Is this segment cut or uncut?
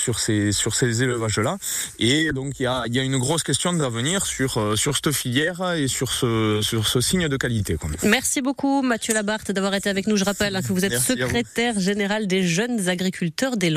uncut